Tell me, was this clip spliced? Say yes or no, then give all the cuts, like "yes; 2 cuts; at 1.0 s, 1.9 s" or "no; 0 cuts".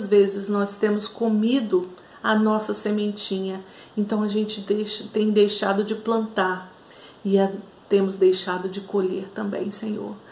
no; 0 cuts